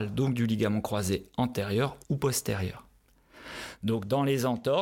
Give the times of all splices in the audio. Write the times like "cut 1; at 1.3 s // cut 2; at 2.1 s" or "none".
cut 1; at 2.0 s

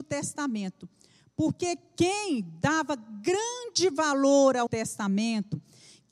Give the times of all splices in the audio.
cut 1; at 4.7 s

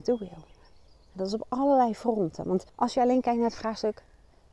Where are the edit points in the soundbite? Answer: cut 1; at 2.7 s

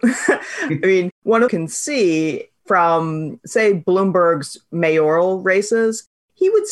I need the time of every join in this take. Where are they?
cut 1; at 1.1 s // cut 2; at 1.5 s

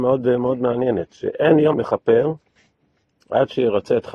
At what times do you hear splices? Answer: cut 1; at 1.7 s

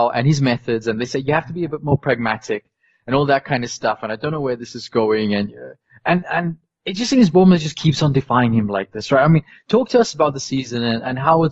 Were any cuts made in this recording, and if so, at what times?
none

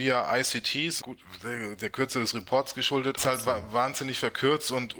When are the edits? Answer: cut 1; at 1.0 s // cut 2; at 3.2 s

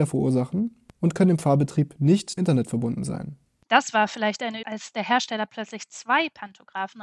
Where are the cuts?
cut 1; at 2.4 s // cut 2; at 4.6 s

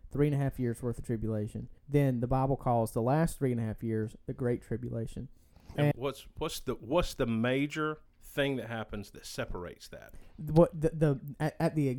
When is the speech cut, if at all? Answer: cut 1; at 1.8 s // cut 2; at 5.9 s // cut 3; at 8.1 s

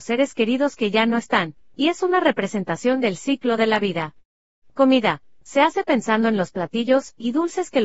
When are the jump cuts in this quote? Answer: none

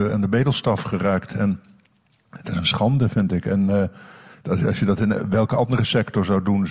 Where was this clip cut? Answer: none

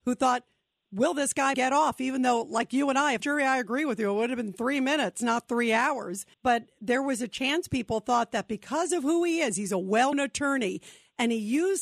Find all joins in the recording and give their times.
cut 1; at 1.5 s // cut 2; at 3.2 s // cut 3; at 6.3 s // cut 4; at 10.1 s

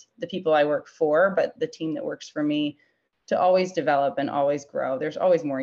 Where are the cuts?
cut 1; at 1.6 s

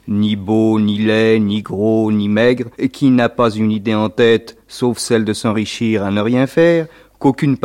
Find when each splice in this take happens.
cut 1; at 2.7 s

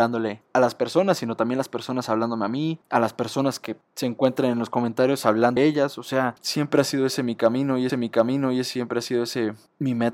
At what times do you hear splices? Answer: cut 1; at 5.6 s // cut 2; at 7.9 s

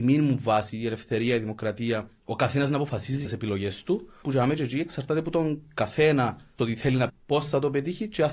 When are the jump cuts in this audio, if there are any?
cut 1; at 2.2 s // cut 2; at 3.3 s // cut 3; at 4.2 s // cut 4; at 6.6 s // cut 5; at 7.1 s

